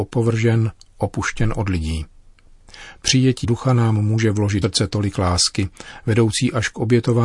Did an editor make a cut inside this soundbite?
yes; 2 cuts; at 3.4 s, 4.6 s

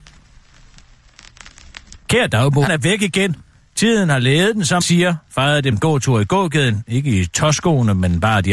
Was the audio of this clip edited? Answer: yes; 3 cuts; at 2.7 s, 4.8 s, 5.7 s

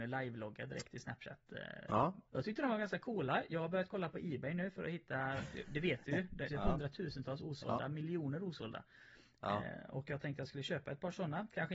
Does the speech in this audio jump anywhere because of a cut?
yes; 2 cuts; at 2.3 s, 6.5 s

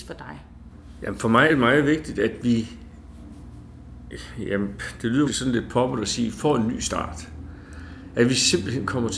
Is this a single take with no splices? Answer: no; 2 cuts; at 1.5 s, 5.3 s

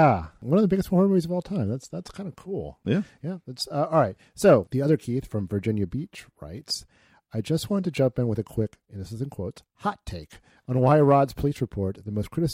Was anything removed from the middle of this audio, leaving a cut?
no; 0 cuts

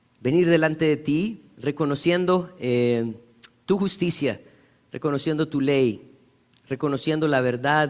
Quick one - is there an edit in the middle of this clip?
no; 0 cuts

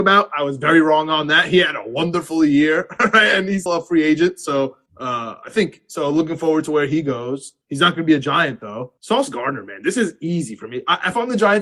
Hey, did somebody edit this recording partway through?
yes; 4 cuts; at 3.7 s, 4.9 s, 7.6 s, 9.0 s

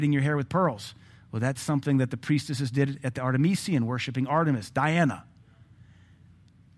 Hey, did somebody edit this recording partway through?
no; 0 cuts

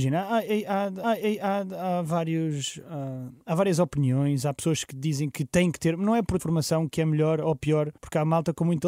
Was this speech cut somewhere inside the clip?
yes; 3 cuts; at 1.0 s, 6.4 s, 8.0 s

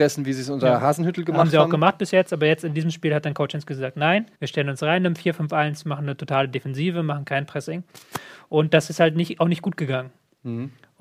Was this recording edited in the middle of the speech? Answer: yes; 1 cut; at 4.3 s

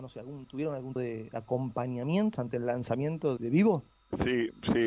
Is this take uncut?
no; 3 cuts; at 1.0 s, 2.3 s, 3.4 s

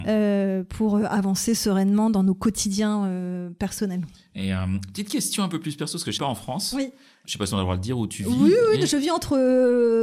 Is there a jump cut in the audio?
yes; 2 cuts; at 6.2 s, 7.3 s

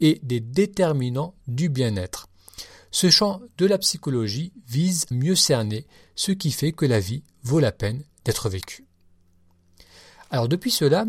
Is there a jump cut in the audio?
yes; 1 cut; at 5.1 s

